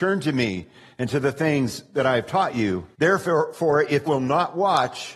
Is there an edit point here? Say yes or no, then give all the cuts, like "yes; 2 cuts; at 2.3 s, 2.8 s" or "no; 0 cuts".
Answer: yes; 2 cuts; at 2.9 s, 4.1 s